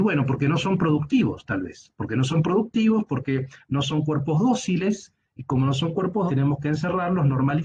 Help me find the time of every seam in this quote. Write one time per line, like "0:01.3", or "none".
0:06.3